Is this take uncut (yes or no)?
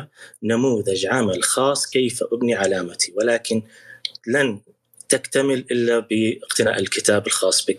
yes